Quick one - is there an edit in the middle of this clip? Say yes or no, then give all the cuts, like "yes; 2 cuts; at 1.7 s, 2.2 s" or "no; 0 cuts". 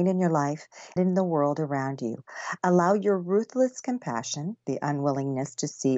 yes; 1 cut; at 1.0 s